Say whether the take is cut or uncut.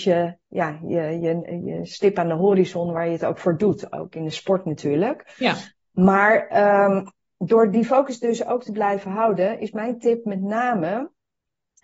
uncut